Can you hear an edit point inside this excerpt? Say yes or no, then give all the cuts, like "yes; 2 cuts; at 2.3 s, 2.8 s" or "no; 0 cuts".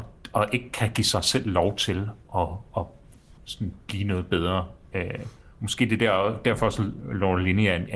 yes; 1 cut; at 3.4 s